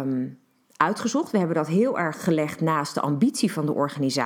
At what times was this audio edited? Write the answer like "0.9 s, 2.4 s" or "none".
none